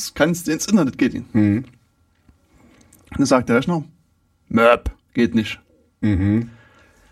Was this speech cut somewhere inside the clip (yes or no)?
no